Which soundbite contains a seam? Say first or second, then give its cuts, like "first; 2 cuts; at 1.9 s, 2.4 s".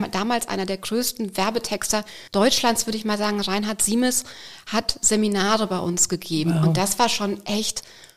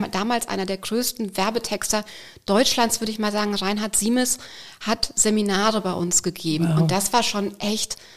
first; 1 cut; at 2.3 s